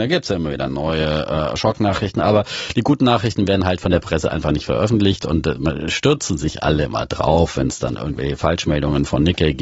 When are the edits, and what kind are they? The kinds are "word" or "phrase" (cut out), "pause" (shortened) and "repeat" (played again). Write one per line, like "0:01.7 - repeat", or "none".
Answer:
none